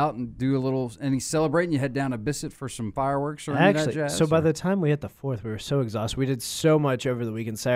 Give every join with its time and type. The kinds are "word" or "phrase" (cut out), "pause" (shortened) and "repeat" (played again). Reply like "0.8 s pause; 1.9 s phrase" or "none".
none